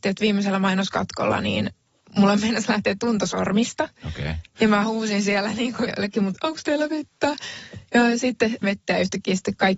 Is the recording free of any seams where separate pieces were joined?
no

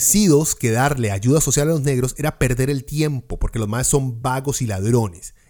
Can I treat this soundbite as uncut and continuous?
yes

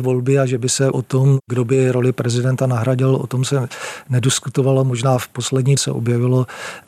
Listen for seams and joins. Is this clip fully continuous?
no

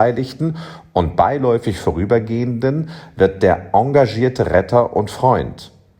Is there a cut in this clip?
no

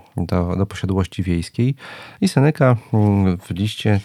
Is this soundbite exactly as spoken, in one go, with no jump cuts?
yes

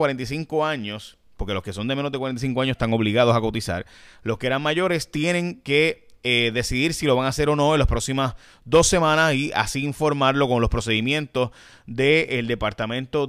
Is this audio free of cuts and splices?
yes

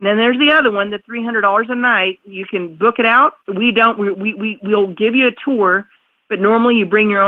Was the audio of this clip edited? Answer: no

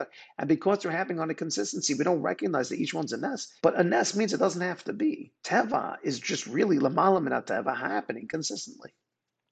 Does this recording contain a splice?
yes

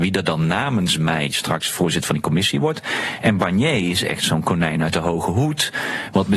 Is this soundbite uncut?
yes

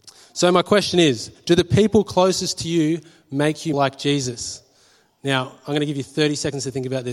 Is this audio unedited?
no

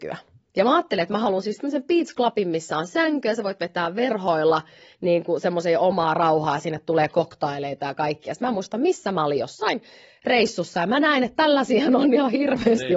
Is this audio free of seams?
yes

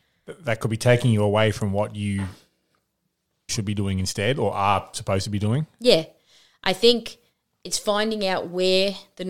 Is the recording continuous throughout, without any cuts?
no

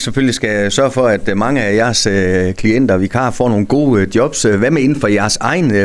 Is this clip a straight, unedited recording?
yes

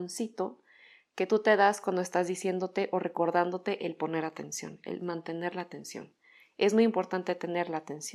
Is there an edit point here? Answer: no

